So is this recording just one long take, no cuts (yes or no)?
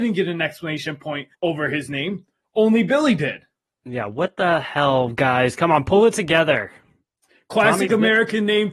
no